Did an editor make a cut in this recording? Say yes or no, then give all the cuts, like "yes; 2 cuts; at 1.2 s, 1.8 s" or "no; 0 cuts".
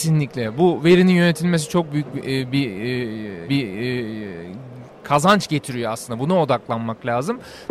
yes; 1 cut; at 3.5 s